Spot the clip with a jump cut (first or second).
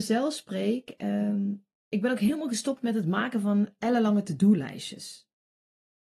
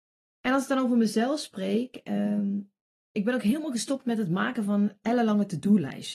first